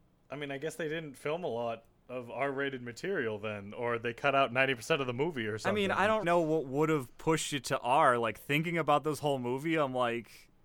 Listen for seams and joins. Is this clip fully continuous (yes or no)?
no